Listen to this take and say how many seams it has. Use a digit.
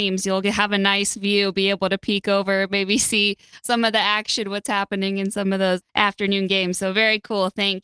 1